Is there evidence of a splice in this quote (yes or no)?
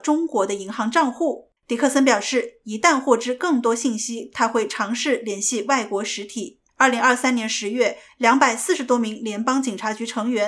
yes